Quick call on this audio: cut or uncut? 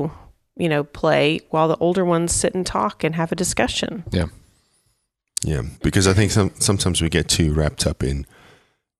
cut